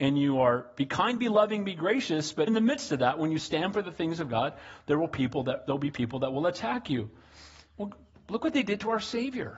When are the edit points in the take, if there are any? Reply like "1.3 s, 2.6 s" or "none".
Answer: 2.5 s